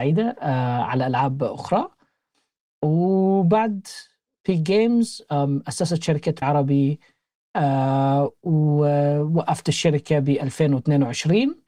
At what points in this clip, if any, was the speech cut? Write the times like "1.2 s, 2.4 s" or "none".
6.4 s